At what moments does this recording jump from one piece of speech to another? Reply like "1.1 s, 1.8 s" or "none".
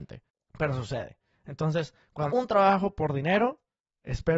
2.3 s